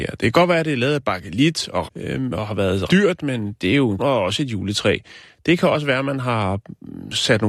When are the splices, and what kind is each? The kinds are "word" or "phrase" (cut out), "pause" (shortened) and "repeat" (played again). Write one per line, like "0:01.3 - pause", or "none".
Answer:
0:01.9 - word
0:02.9 - word
0:04.0 - word

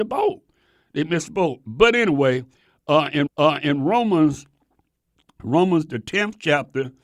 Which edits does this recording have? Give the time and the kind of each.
0:03.3 - repeat

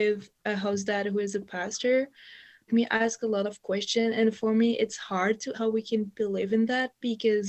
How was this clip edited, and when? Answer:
0:02.7 - word
0:05.5 - word

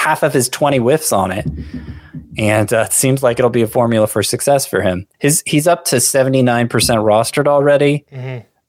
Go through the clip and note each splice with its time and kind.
0:05.1 - pause

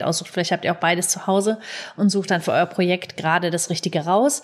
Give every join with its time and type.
none

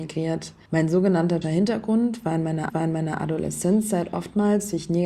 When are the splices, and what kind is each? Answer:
0:01.4 - word
0:02.7 - repeat

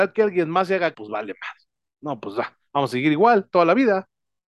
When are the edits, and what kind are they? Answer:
0:00.9 - phrase

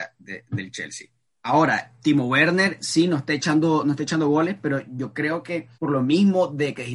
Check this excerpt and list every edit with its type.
0:01.3 - pause
0:05.7 - pause

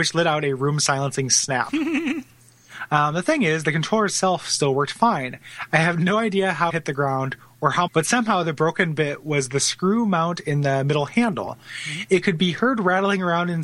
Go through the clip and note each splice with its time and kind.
0:06.7 - word
0:07.9 - phrase

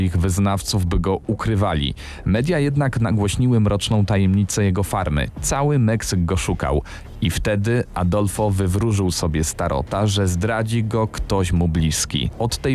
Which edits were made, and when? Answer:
none

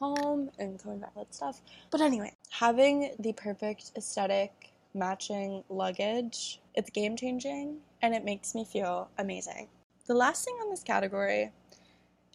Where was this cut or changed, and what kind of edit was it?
0:01.1 - phrase
0:01.9 - pause
0:03.1 - word
0:06.7 - pause

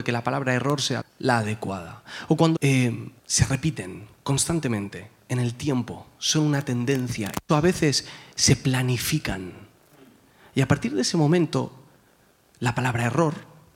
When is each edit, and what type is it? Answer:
0:01.0 - word
0:02.5 - phrase
0:03.2 - pause
0:07.5 - word

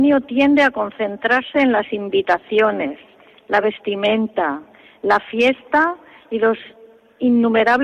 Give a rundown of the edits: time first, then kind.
none

